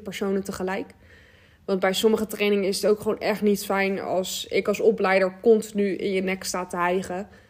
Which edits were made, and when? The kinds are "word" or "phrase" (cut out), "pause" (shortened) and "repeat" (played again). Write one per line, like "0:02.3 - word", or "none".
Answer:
none